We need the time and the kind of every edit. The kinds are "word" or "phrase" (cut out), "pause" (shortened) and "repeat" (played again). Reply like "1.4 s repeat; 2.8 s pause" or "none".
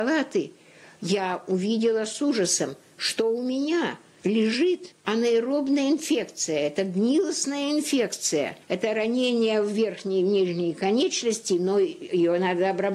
8.6 s pause